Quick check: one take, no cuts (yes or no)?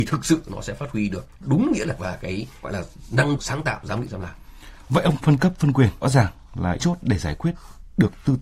no